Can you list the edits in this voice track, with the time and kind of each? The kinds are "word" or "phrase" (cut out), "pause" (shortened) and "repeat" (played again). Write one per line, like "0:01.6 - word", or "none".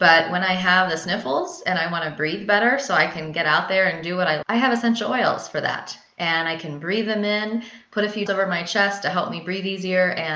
0:04.4 - word
0:08.3 - word